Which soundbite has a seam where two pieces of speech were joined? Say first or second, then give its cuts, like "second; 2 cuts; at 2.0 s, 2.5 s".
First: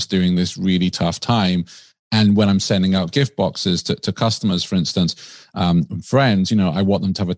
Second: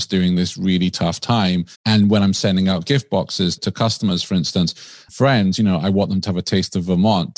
second; 3 cuts; at 1.7 s, 3.6 s, 5.1 s